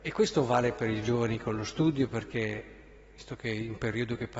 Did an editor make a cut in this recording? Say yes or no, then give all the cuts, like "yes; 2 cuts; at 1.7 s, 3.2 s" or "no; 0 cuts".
no; 0 cuts